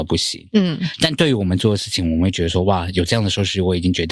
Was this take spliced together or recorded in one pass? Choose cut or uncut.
uncut